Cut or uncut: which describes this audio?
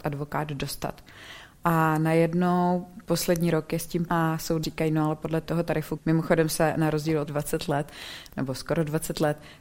cut